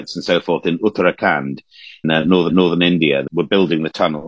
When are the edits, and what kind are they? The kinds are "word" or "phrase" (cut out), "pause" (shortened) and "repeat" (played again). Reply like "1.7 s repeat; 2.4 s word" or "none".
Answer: 2.0 s word; 2.5 s repeat; 3.3 s word